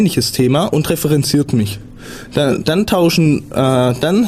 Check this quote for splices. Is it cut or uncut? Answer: uncut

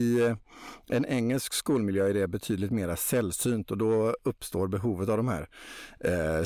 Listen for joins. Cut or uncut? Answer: uncut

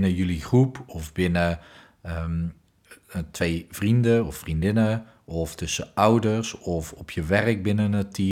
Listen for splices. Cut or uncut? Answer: uncut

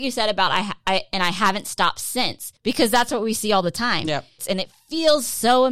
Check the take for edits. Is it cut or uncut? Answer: cut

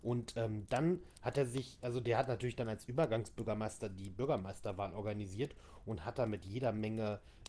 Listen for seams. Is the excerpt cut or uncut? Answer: uncut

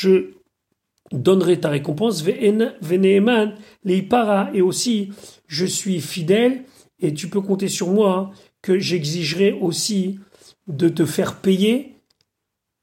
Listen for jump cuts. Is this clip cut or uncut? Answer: uncut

